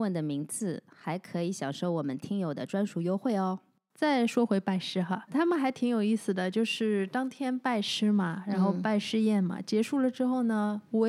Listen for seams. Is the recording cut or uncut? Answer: cut